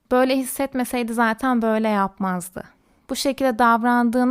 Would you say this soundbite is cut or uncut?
uncut